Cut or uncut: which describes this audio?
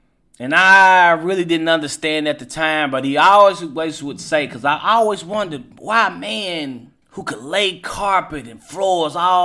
cut